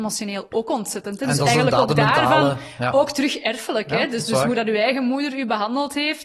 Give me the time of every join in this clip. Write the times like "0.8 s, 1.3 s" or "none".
none